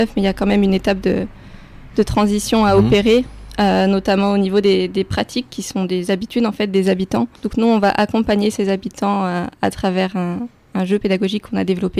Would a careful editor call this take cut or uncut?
cut